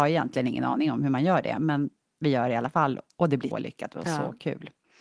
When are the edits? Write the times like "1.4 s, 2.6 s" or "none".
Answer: 3.5 s